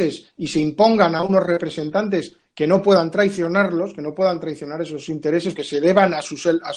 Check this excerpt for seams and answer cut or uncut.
cut